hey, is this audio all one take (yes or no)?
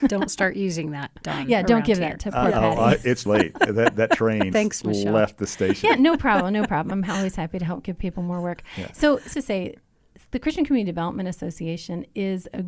no